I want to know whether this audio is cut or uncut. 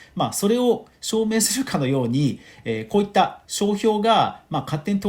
cut